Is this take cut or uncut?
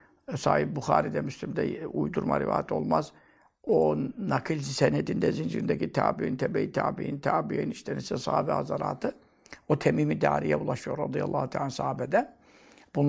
uncut